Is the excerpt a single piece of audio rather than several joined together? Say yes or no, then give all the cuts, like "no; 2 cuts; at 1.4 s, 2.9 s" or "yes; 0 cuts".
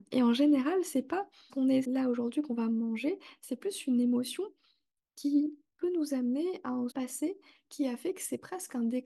no; 3 cuts; at 1.5 s, 1.8 s, 6.9 s